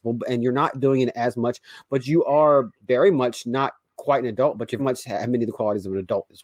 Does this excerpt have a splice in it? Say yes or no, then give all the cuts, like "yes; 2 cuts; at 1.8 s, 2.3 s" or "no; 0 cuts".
yes; 1 cut; at 4.8 s